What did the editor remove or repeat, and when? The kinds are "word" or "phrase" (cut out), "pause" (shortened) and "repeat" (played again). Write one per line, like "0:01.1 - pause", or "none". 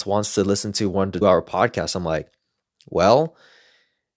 0:01.2 - word